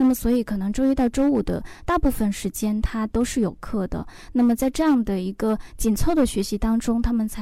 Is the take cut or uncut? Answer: uncut